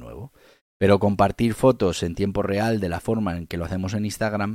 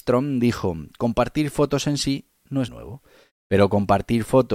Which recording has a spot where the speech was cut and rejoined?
second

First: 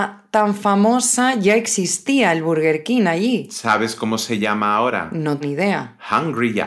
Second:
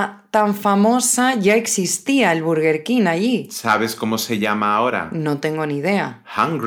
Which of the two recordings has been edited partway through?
first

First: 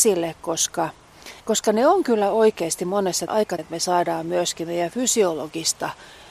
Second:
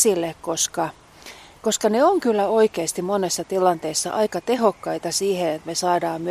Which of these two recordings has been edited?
first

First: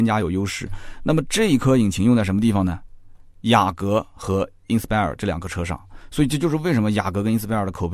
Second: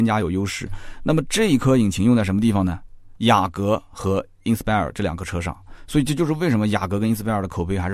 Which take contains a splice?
second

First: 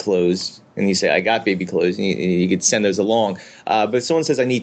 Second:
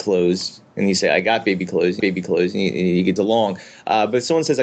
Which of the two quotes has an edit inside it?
second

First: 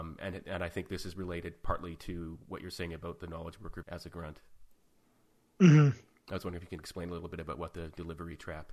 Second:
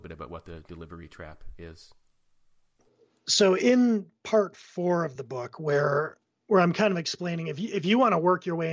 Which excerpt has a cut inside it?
first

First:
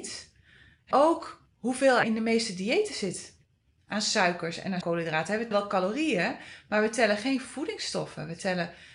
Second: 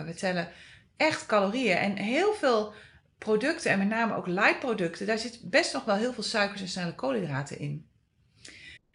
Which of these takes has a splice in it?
first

